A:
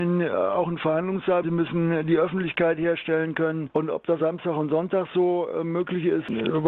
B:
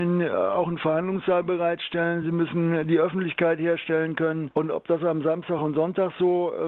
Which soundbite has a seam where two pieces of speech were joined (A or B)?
A